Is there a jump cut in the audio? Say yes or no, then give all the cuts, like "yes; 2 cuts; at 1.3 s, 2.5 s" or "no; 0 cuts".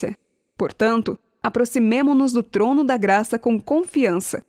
no; 0 cuts